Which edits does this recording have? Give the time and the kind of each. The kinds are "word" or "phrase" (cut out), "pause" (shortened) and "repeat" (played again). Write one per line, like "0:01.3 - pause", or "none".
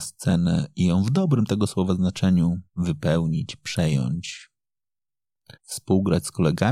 0:02.7 - pause
0:05.5 - pause